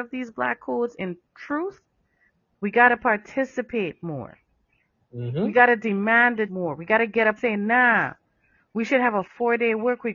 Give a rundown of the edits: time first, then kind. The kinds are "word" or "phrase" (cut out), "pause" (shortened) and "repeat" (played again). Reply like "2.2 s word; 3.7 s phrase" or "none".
6.5 s word; 7.4 s word

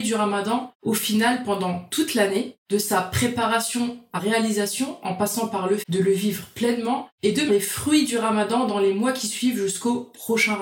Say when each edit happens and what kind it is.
4.2 s word; 5.8 s word; 7.5 s word

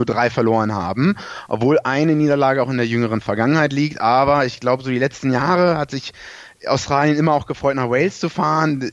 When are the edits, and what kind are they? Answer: none

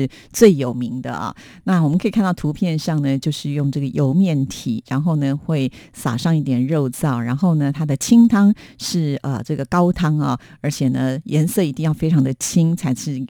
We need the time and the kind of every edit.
none

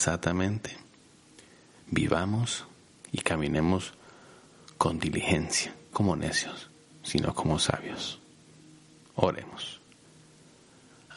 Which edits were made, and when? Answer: 5.9 s word

